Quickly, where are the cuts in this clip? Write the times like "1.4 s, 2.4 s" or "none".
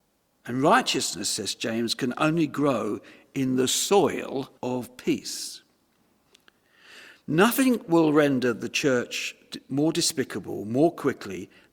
4.6 s